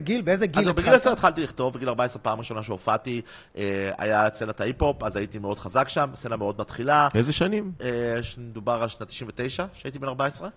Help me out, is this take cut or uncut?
uncut